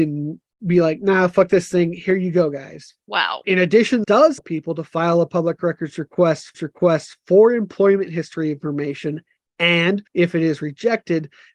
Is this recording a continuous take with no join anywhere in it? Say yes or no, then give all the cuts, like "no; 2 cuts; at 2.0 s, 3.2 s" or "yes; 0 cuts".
no; 4 cuts; at 4.0 s, 4.4 s, 6.5 s, 10.1 s